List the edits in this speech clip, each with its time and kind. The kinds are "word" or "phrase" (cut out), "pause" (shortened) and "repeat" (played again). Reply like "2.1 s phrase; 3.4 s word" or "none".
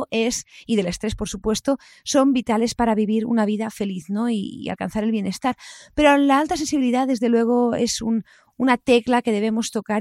none